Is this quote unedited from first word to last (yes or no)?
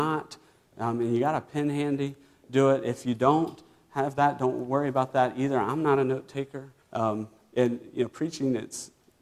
no